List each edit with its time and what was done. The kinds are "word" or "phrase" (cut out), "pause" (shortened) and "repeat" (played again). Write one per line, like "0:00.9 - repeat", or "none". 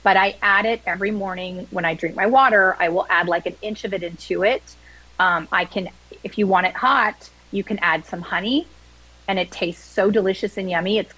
none